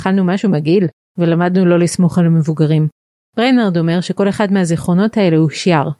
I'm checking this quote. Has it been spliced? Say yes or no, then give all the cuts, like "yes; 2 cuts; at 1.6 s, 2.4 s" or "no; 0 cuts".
no; 0 cuts